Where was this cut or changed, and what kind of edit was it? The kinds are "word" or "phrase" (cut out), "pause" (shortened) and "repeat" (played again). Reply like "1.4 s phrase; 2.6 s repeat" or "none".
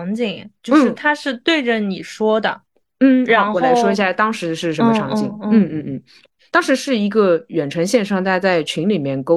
none